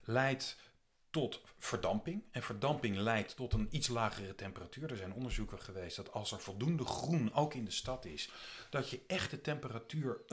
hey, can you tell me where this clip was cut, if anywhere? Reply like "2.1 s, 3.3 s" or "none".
none